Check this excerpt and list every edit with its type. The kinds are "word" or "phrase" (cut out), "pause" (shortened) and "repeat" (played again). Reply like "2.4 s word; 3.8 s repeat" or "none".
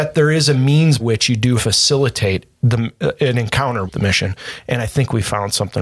1.0 s word; 1.6 s phrase; 2.5 s pause; 3.9 s word